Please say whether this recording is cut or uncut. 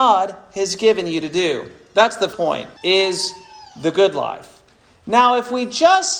cut